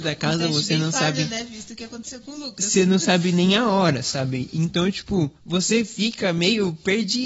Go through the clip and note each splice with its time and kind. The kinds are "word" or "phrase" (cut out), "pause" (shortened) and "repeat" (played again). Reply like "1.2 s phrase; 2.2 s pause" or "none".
5.4 s pause